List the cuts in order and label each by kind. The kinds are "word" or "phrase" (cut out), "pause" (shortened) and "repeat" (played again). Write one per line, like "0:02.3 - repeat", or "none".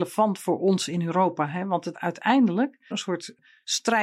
0:01.9 - word
0:02.9 - phrase